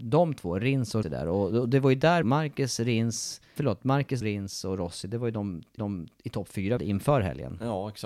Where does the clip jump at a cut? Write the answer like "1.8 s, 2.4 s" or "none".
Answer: 1.0 s, 2.2 s, 3.6 s, 4.2 s, 5.8 s, 6.8 s